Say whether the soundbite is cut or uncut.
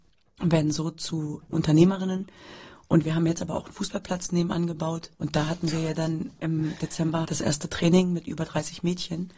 cut